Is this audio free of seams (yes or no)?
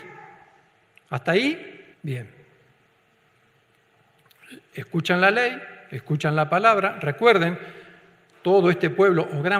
no